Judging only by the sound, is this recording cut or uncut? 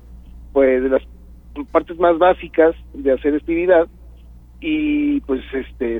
cut